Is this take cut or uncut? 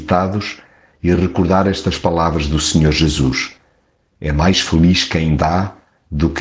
uncut